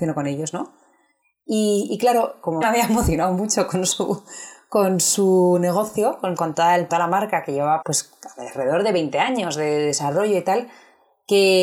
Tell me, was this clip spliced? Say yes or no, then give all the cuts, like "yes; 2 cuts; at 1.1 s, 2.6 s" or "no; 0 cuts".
yes; 4 cuts; at 2.6 s, 6.4 s, 6.9 s, 7.8 s